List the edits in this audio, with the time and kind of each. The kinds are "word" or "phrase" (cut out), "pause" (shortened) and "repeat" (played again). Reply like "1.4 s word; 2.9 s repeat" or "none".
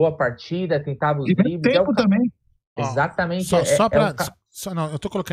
none